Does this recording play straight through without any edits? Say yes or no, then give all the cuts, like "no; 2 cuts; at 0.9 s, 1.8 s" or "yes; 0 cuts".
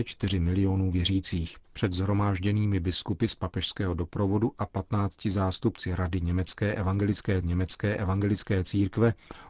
no; 2 cuts; at 1.6 s, 7.4 s